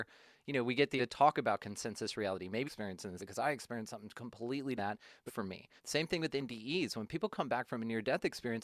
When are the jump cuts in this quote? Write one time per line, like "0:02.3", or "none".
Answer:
0:01.0
0:02.6
0:03.2
0:04.8
0:05.3
0:05.8